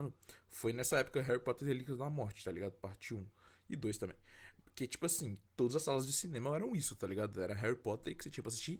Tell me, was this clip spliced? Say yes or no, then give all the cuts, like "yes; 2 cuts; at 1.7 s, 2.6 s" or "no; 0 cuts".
no; 0 cuts